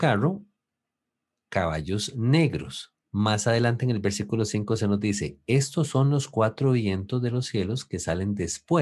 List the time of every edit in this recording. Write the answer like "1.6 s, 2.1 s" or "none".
3.0 s